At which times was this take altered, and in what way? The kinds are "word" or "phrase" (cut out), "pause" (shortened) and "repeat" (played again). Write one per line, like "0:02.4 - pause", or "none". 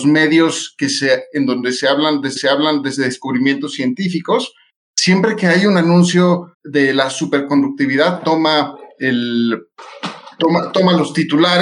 0:02.4 - repeat
0:06.5 - pause